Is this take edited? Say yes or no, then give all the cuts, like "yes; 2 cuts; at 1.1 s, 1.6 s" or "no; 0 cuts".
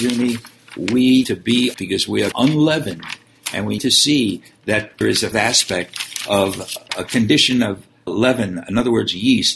yes; 8 cuts; at 1.2 s, 1.7 s, 2.3 s, 3.8 s, 5.0 s, 5.3 s, 6.9 s, 8.1 s